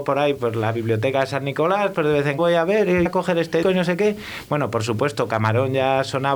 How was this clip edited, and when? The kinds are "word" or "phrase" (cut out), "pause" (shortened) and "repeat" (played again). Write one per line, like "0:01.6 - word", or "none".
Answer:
0:02.4 - word
0:03.1 - word
0:03.6 - word

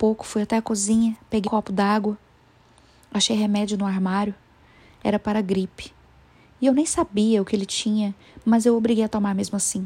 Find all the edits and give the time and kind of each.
0:01.4 - word

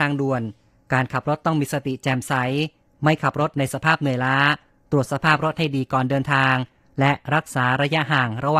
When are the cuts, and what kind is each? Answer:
none

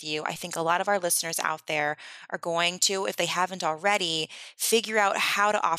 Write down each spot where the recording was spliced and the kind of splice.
none

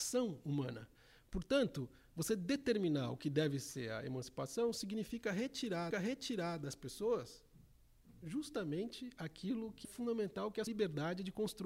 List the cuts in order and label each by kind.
0:05.9 - repeat
0:09.8 - word
0:10.7 - word

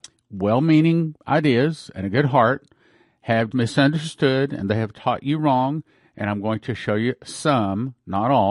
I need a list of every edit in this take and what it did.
0:03.5 - word

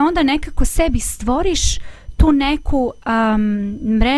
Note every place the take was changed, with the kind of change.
none

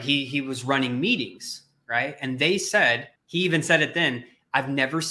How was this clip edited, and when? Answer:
0:03.2 - pause

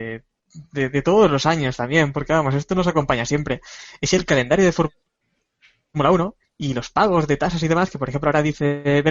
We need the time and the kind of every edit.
0:06.4 - pause

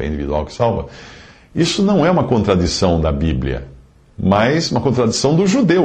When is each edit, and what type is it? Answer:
none

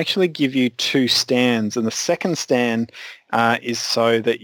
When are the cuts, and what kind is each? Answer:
none

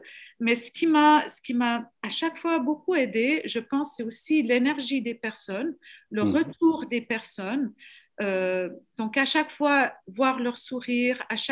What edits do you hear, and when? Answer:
none

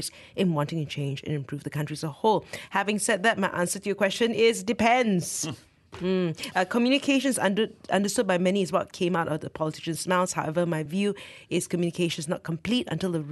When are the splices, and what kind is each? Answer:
none

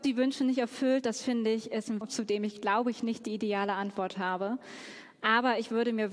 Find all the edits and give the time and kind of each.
0:02.0 - phrase

